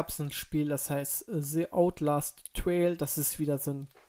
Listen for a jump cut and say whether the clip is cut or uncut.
uncut